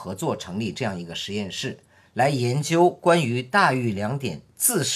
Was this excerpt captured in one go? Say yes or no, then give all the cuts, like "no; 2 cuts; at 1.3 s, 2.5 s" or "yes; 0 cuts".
yes; 0 cuts